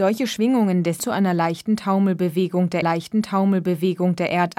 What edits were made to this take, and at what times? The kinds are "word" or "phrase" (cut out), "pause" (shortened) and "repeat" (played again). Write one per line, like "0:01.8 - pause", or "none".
0:01.0 - phrase
0:02.8 - repeat